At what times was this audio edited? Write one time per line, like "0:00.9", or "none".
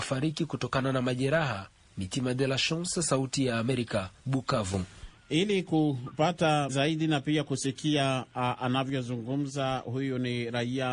0:04.2
0:06.7